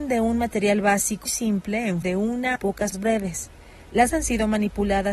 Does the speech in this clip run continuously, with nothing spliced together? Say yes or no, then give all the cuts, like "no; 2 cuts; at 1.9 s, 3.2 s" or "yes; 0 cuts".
no; 5 cuts; at 1.3 s, 2.0 s, 2.6 s, 2.9 s, 4.1 s